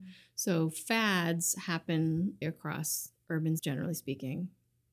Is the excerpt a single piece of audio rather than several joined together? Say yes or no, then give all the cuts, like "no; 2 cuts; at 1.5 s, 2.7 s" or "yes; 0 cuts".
no; 2 cuts; at 2.4 s, 3.6 s